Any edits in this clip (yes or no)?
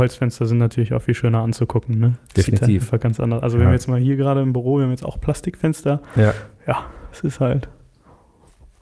no